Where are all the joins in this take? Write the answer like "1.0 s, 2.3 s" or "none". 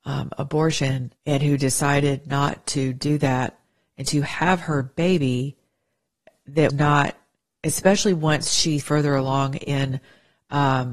1.2 s, 6.7 s, 8.8 s

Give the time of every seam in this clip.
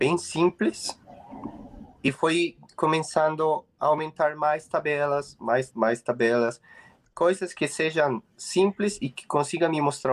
5.7 s

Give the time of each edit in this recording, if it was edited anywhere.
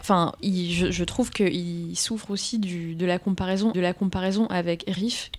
3.7 s

